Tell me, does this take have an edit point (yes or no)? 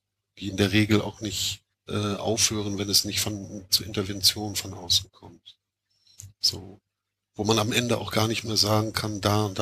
yes